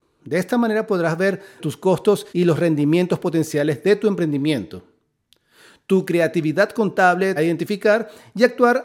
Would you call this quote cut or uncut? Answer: cut